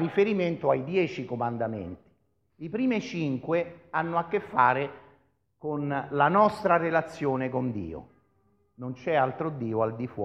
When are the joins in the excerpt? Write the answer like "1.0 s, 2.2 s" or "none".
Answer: none